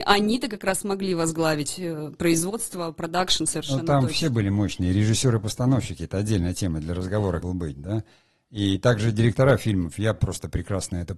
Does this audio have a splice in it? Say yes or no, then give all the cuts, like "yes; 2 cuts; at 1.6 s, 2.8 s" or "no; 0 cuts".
yes; 1 cut; at 7.4 s